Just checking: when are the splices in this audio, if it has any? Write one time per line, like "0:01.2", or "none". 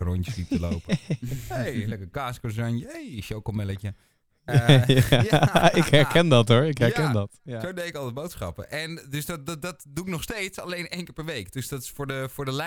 none